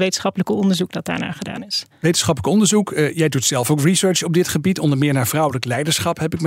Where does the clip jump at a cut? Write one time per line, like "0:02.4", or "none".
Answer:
none